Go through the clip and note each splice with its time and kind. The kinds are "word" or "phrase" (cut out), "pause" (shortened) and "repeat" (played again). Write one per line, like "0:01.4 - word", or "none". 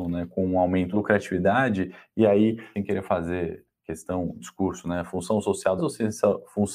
0:00.9 - word
0:02.7 - phrase
0:04.4 - word
0:05.8 - phrase